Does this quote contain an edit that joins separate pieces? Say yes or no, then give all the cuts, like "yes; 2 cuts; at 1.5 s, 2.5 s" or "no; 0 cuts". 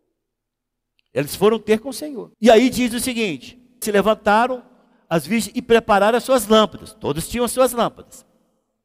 yes; 2 cuts; at 2.3 s, 3.8 s